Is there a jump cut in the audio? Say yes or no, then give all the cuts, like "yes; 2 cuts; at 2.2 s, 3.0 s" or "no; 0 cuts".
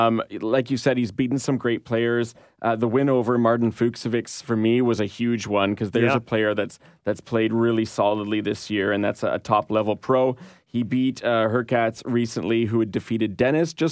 no; 0 cuts